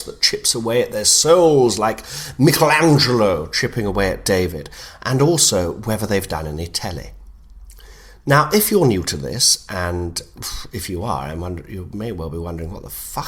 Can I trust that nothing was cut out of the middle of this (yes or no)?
yes